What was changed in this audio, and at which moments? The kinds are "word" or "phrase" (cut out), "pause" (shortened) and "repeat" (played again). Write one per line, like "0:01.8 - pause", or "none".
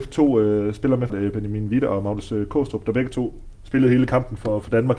0:01.1 - phrase